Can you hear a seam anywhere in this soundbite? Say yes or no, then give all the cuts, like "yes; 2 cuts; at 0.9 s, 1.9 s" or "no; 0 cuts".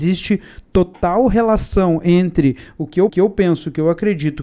yes; 1 cut; at 3.1 s